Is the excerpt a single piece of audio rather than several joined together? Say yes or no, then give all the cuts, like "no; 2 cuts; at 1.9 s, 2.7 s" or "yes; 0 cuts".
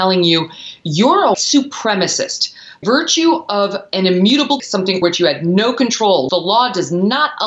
no; 5 cuts; at 1.3 s, 2.8 s, 4.6 s, 5.0 s, 6.3 s